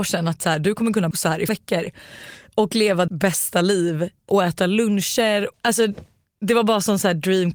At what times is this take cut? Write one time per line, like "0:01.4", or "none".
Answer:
0:01.1
0:01.5
0:03.1
0:04.3
0:05.5